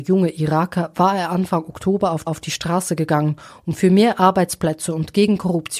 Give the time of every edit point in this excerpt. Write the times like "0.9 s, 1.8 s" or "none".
2.3 s